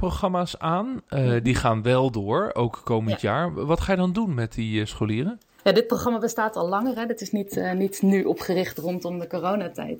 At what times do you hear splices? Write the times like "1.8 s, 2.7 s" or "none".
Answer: 5.6 s